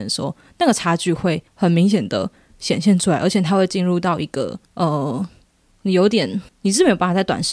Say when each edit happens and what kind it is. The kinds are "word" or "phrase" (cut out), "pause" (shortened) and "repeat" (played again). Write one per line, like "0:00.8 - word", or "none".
0:01.5 - pause
0:04.6 - pause
0:06.5 - pause